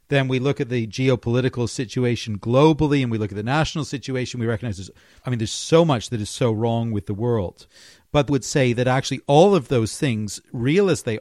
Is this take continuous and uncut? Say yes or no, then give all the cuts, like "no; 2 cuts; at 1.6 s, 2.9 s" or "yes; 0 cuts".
no; 1 cut; at 8.3 s